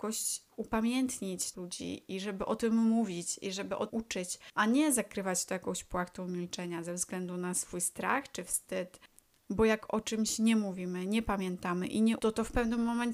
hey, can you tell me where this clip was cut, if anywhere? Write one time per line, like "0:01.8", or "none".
0:01.5
0:03.9
0:12.2